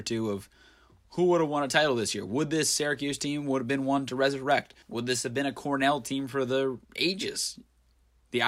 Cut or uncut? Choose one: cut